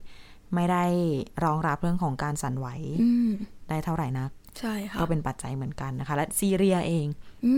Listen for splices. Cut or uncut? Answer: cut